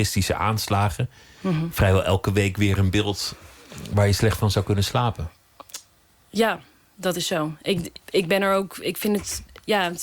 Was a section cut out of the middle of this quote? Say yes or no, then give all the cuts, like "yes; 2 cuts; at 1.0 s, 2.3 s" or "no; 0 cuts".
yes; 1 cut; at 8.0 s